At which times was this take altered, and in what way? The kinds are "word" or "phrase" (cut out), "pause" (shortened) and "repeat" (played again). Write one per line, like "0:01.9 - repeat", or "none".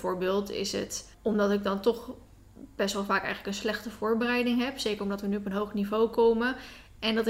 0:01.1 - pause